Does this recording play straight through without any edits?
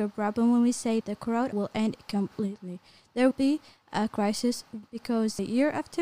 no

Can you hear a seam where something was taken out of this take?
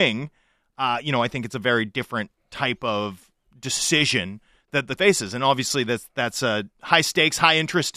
yes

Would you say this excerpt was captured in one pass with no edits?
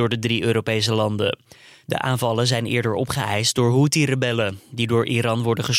yes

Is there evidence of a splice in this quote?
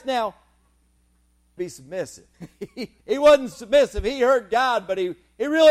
yes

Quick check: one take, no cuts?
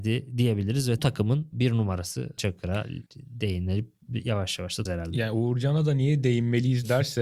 no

